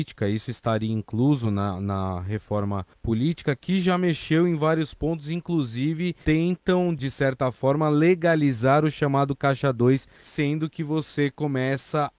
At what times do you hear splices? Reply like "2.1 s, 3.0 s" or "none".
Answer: none